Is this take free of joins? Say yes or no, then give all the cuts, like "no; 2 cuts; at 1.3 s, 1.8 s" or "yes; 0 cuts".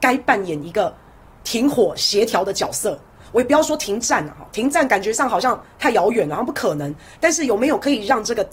yes; 0 cuts